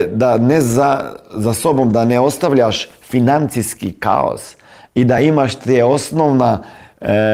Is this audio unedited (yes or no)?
yes